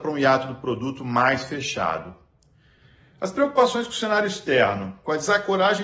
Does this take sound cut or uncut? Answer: uncut